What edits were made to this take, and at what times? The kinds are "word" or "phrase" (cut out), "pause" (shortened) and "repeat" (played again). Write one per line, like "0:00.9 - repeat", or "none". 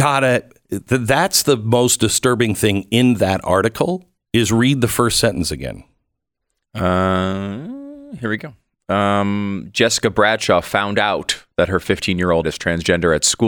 0:12.4 - word